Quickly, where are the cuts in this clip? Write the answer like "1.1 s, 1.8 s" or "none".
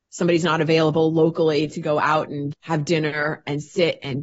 2.5 s